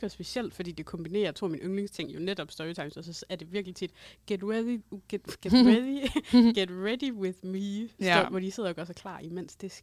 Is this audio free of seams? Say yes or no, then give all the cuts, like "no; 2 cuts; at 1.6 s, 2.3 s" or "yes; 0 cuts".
yes; 0 cuts